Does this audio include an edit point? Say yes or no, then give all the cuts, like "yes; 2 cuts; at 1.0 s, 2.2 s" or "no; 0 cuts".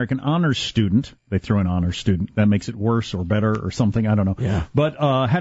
yes; 1 cut; at 1.2 s